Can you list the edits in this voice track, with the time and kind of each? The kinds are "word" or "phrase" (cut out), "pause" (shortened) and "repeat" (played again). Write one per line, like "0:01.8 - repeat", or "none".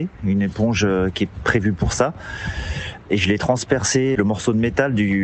0:04.2 - word